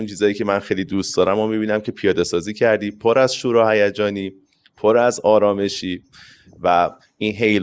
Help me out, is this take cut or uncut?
uncut